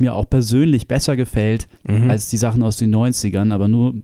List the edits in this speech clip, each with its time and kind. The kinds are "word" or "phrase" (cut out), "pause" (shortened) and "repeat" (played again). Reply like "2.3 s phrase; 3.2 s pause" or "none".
1.7 s pause